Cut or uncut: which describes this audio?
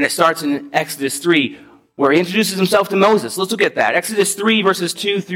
uncut